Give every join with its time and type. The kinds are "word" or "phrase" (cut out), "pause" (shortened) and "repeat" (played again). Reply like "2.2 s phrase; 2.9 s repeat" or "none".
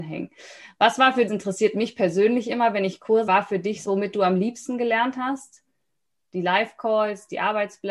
1.3 s phrase; 3.3 s word; 3.8 s phrase